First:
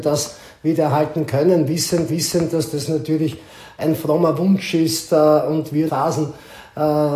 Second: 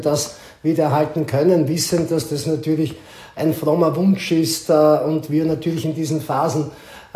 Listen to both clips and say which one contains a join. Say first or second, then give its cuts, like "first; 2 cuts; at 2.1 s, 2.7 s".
first; 2 cuts; at 2.1 s, 5.9 s